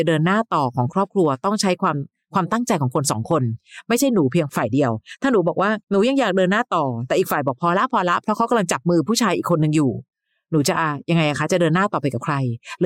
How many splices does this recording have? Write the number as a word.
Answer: one